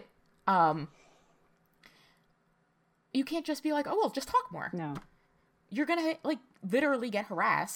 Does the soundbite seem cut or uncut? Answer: uncut